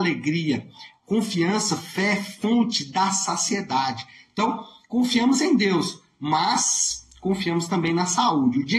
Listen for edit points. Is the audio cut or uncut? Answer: uncut